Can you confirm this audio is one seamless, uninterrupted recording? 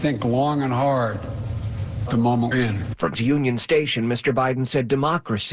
no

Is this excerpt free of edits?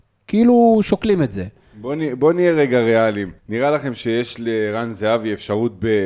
no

